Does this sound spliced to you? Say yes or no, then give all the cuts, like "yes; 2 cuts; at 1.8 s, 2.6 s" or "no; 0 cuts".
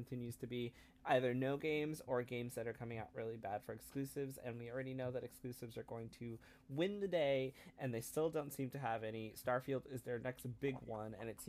no; 0 cuts